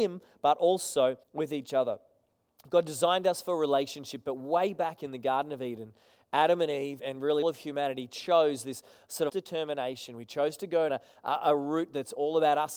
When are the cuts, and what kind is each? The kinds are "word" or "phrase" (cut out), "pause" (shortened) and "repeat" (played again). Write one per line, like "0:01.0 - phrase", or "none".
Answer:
0:01.2 - pause
0:07.0 - word
0:07.4 - word
0:09.3 - phrase
0:10.9 - word

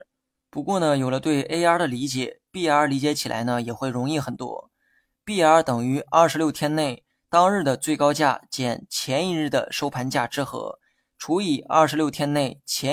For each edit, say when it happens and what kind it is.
none

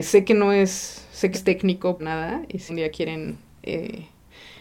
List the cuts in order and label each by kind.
0:01.3 - word
0:02.0 - word
0:02.7 - word

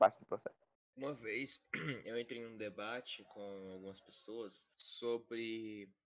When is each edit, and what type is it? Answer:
0:04.7 - pause

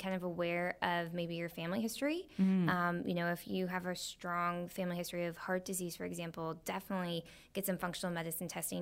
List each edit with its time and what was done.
none

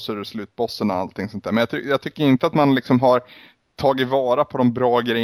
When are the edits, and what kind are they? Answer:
none

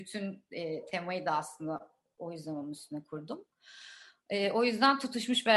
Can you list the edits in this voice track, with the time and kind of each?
none

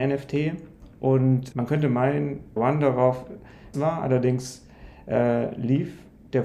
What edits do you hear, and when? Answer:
0:01.5 - word
0:02.6 - phrase
0:03.7 - word

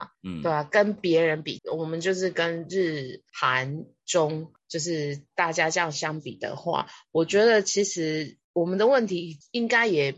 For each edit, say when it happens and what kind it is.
0:01.6 - phrase

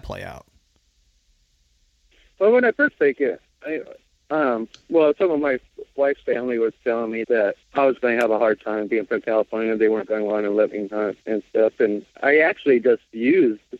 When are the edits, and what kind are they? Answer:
0:02.9 - phrase
0:07.2 - word
0:07.6 - pause
0:11.2 - pause
0:12.1 - pause

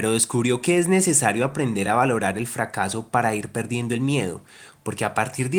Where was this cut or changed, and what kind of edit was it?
none

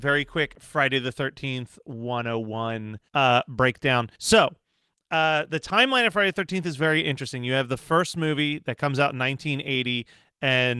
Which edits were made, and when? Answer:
0:03.1 - pause
0:04.1 - pause

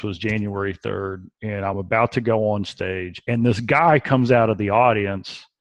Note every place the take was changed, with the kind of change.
none

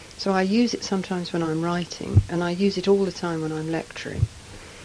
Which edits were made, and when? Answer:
none

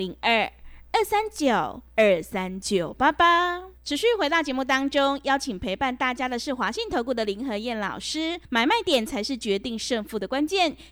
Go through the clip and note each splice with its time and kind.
0:01.9 - pause
0:03.8 - pause
0:08.4 - pause

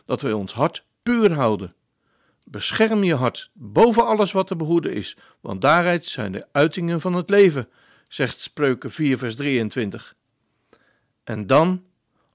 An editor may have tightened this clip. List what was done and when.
none

